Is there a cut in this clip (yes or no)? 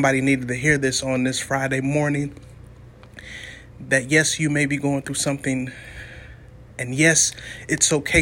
yes